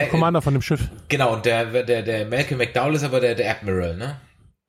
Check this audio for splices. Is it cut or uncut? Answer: uncut